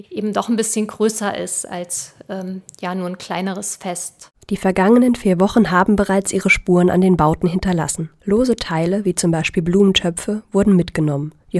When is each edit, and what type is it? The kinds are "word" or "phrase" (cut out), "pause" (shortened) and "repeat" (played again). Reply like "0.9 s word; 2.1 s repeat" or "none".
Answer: none